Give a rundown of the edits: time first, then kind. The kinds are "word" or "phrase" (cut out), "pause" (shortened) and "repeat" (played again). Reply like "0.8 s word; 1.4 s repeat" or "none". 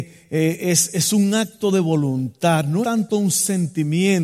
2.8 s word